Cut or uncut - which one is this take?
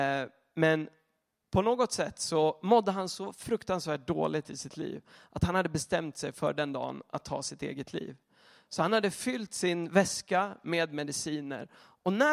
uncut